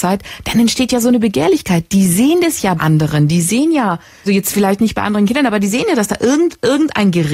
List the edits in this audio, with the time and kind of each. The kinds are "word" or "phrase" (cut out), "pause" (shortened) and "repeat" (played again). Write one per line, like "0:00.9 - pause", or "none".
0:02.8 - word
0:04.3 - word